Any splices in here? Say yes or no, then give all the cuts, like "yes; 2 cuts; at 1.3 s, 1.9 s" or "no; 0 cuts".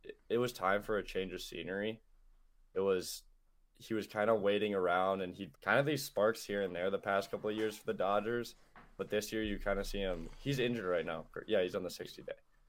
yes; 1 cut; at 5.5 s